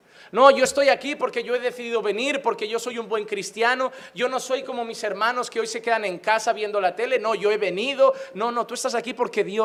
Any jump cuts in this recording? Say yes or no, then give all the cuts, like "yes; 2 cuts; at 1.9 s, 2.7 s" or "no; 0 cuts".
no; 0 cuts